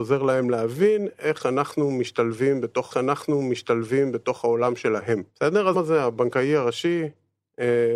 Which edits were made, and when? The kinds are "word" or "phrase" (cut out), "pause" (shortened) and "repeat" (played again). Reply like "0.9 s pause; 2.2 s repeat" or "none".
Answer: 2.9 s repeat; 5.3 s pause; 5.7 s phrase